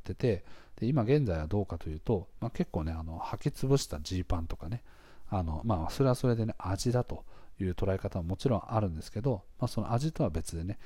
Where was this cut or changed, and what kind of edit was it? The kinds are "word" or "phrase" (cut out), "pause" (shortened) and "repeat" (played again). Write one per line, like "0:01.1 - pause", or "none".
none